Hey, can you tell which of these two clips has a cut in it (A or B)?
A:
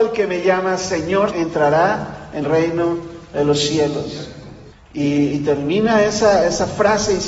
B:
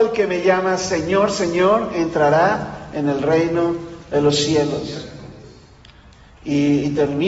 A